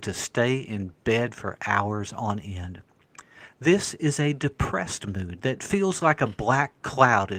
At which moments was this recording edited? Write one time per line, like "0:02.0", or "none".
none

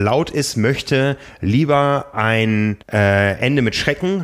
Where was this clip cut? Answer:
0:02.8

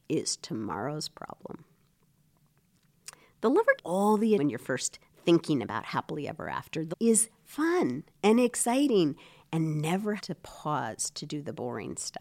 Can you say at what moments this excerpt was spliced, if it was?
0:03.8
0:04.4
0:06.9
0:10.2

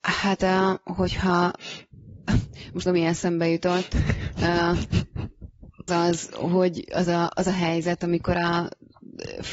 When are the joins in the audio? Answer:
0:02.9
0:05.9

